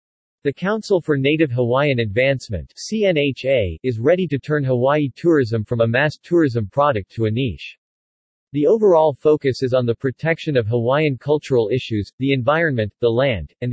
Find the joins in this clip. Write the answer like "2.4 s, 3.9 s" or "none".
none

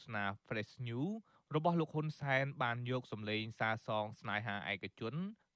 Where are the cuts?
none

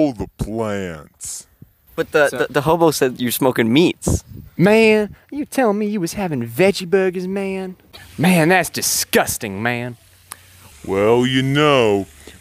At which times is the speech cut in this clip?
none

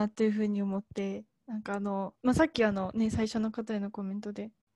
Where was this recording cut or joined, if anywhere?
2.2 s

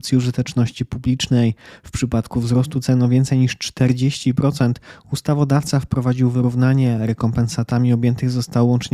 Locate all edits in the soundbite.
none

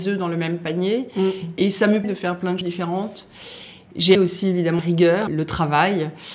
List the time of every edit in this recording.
2.0 s, 2.6 s, 4.1 s, 4.8 s, 5.3 s

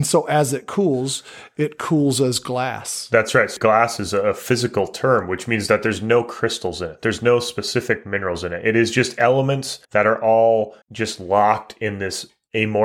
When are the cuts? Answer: 9.8 s, 10.8 s

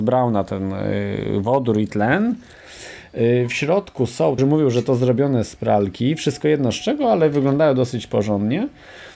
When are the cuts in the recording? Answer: 4.4 s

